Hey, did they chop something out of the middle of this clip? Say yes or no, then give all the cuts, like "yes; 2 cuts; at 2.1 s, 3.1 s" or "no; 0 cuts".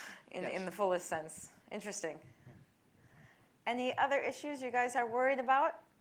no; 0 cuts